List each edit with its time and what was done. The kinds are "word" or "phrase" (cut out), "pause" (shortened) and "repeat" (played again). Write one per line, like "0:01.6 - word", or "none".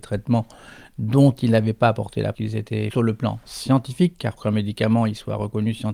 0:02.3 - word
0:02.9 - word
0:04.4 - word